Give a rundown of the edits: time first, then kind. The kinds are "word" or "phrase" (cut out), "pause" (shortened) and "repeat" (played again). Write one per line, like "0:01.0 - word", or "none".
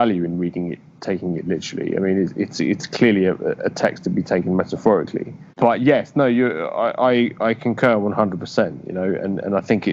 0:05.5 - pause